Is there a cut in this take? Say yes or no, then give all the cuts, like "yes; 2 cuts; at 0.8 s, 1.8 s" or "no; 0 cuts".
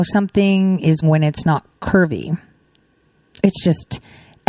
yes; 1 cut; at 1.0 s